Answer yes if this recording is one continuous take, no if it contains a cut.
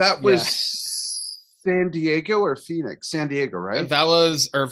yes